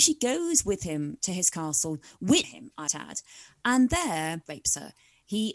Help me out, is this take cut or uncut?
cut